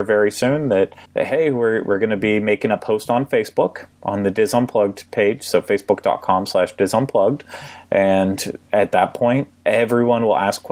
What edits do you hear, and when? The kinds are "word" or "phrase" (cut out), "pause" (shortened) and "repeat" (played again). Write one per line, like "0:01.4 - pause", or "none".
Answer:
0:01.1 - pause